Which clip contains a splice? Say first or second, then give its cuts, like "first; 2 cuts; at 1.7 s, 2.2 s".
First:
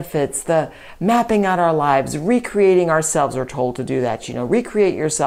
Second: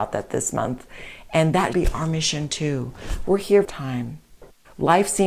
second; 2 cuts; at 1.7 s, 3.6 s